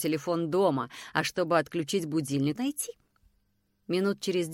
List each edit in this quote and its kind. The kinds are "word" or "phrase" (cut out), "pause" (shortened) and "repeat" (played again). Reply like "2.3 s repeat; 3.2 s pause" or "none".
2.5 s phrase

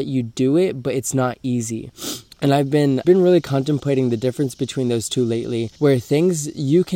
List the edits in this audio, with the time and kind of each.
2.3 s pause; 3.0 s word; 5.8 s pause

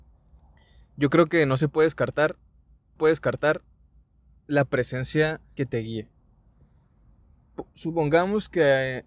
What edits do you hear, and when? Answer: 3.0 s repeat; 5.6 s phrase

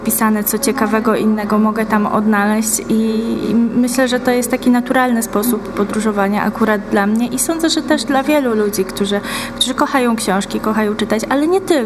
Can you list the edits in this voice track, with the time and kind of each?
none

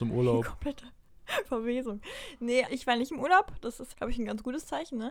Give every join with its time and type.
1.4 s word; 2.7 s word; 3.9 s word

